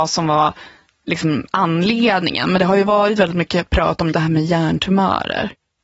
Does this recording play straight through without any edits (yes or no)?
no